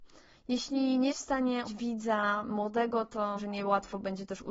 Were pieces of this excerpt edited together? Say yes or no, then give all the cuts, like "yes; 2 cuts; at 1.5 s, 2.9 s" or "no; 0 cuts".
yes; 3 cuts; at 1.1 s, 1.7 s, 3.4 s